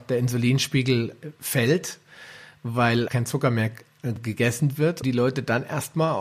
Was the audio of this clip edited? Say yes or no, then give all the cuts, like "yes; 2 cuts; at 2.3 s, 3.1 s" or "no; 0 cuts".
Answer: yes; 2 cuts; at 3.1 s, 5.0 s